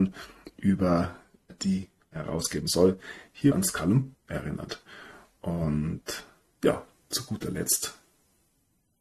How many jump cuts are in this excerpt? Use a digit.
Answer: 4